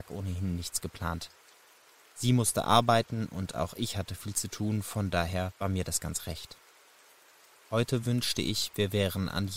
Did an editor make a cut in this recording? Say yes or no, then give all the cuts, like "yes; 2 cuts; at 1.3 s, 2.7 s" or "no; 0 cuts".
no; 0 cuts